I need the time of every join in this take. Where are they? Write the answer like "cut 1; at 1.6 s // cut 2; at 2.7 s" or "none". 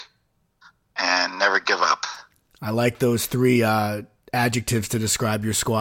none